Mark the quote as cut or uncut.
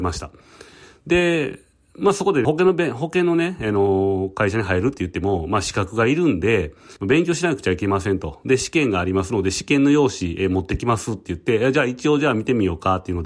cut